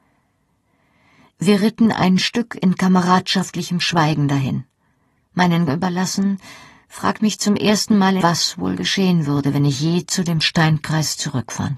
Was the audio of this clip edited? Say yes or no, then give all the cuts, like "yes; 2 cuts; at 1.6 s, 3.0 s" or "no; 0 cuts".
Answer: yes; 3 cuts; at 5.7 s, 7.2 s, 8.2 s